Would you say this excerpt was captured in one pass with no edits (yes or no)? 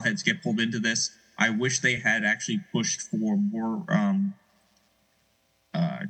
yes